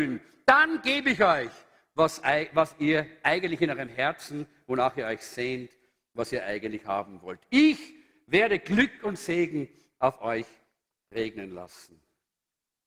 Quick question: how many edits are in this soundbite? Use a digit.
0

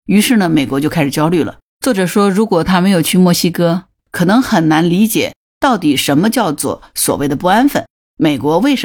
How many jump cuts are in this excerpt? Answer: 2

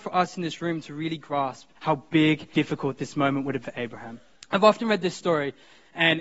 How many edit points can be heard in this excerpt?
4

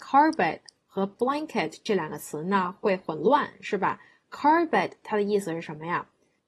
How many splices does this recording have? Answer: 0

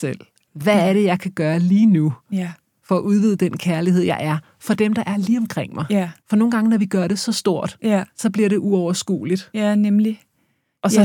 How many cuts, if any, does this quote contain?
2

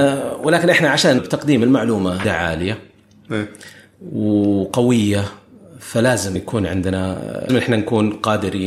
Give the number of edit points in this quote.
4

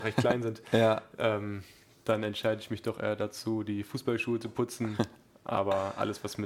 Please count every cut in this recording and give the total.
0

